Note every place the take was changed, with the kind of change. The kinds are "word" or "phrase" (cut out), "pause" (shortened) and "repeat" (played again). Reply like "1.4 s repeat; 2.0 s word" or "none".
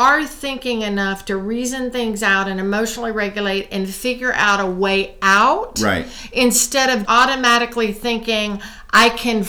7.0 s word